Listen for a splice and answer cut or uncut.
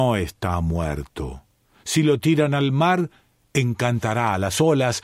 uncut